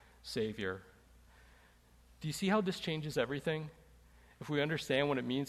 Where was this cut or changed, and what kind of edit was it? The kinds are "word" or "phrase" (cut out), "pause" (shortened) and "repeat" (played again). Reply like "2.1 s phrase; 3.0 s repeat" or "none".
none